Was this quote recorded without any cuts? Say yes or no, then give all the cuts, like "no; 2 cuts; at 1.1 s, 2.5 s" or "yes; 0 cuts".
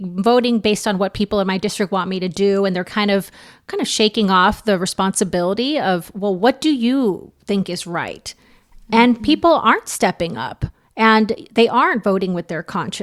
yes; 0 cuts